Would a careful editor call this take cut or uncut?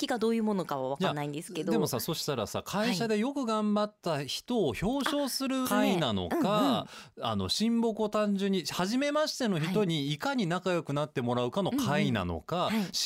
cut